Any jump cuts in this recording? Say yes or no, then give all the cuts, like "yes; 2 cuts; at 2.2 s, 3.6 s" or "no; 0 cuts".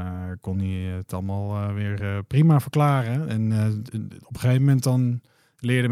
no; 0 cuts